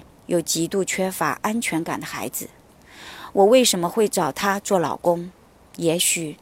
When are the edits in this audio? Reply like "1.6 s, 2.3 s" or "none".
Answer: none